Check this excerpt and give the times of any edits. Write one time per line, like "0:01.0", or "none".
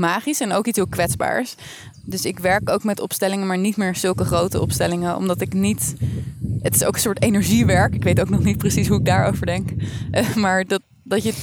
none